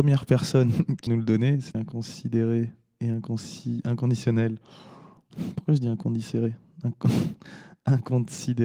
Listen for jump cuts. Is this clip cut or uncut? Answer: cut